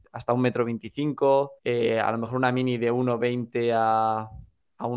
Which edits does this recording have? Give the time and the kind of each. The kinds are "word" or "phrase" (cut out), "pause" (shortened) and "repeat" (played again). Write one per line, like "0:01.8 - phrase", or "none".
0:01.6 - pause

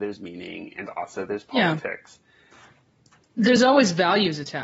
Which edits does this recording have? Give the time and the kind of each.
none

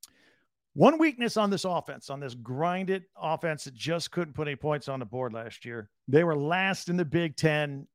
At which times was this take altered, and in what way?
0:06.0 - pause

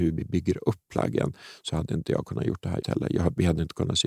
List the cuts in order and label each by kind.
0:02.8 - word

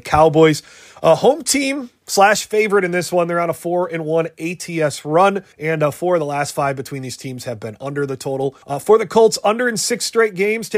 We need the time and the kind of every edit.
0:05.5 - pause
0:08.6 - pause

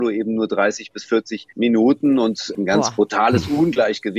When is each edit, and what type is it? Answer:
0:01.5 - pause
0:02.6 - phrase

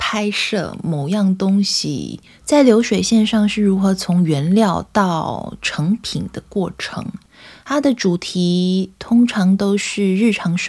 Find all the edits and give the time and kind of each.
0:02.3 - pause

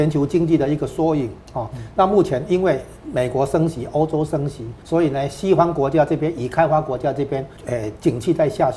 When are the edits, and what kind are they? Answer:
0:04.8 - pause
0:07.6 - pause

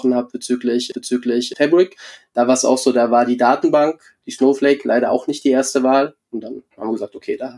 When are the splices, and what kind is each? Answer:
0:00.9 - repeat
0:06.7 - pause

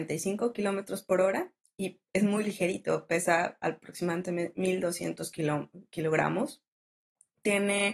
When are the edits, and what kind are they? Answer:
none

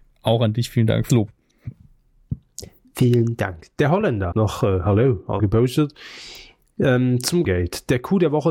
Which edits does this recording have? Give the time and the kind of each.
0:01.1 - word
0:04.3 - word
0:05.4 - word
0:07.4 - word

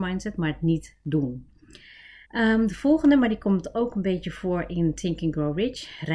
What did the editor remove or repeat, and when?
0:02.2 - pause

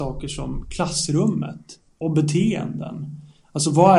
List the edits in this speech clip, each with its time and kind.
none

